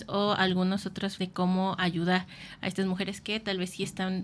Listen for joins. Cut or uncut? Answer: cut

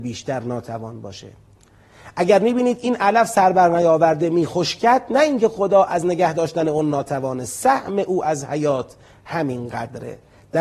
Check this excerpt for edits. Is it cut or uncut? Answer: uncut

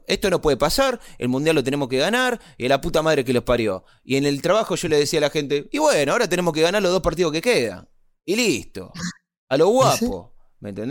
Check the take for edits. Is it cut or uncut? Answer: uncut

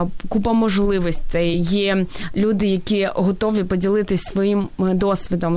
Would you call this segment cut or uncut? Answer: uncut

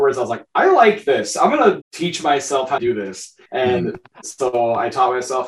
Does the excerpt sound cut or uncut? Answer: cut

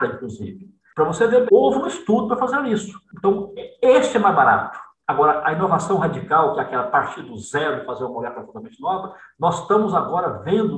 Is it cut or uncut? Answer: cut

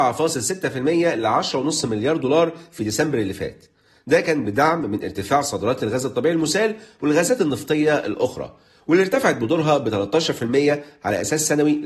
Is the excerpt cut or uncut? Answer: uncut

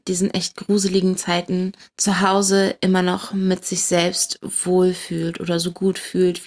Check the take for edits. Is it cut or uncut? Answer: uncut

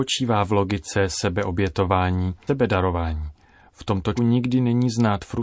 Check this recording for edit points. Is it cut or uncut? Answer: cut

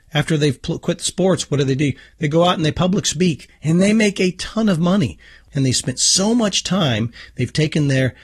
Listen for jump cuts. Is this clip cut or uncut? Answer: uncut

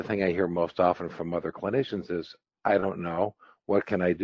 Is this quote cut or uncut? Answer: uncut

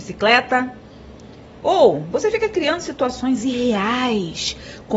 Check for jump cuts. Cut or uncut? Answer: uncut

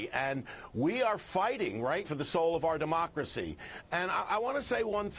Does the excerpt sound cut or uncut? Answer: cut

